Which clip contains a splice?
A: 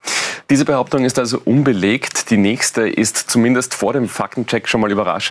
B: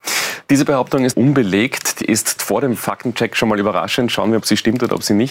B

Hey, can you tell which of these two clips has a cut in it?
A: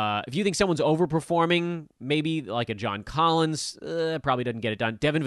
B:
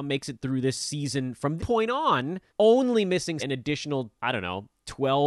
B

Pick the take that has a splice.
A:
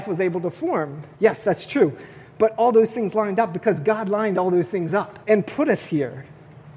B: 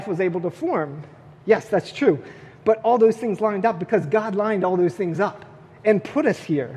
A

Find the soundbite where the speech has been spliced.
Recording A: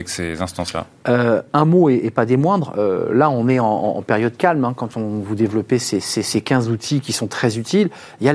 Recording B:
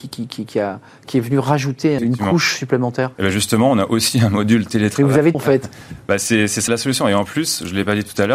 B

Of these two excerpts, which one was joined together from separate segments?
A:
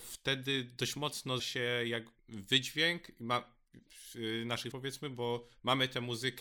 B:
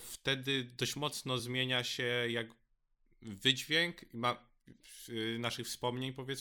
A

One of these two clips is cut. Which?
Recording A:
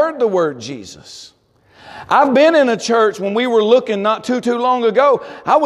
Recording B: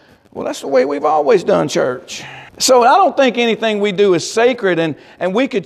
B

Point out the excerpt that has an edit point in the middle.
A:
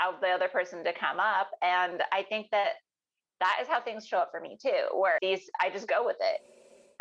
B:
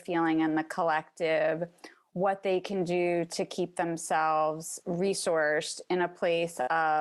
A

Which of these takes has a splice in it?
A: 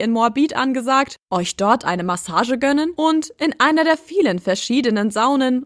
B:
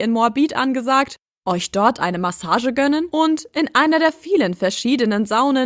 A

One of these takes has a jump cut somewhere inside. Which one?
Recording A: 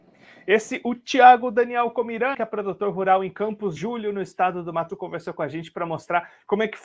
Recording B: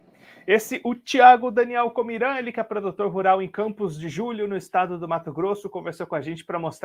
A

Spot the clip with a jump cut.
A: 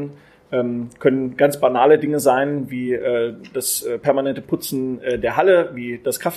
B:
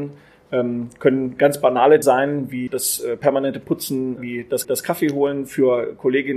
B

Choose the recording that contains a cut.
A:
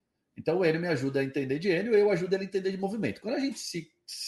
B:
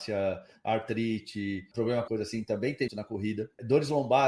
B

